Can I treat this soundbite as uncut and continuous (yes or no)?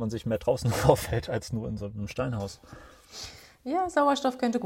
yes